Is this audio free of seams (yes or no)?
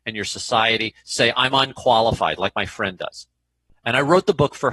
yes